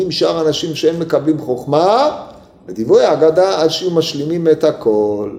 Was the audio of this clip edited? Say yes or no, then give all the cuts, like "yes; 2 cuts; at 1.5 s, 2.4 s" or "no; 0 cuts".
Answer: no; 0 cuts